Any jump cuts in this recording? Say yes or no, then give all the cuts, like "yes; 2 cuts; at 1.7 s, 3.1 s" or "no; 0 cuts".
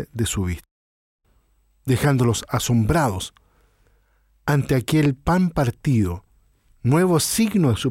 no; 0 cuts